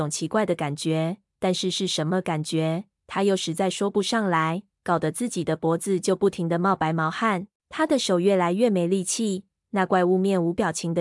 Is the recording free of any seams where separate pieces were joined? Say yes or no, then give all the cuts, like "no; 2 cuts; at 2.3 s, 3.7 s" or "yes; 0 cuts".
no; 1 cut; at 7.6 s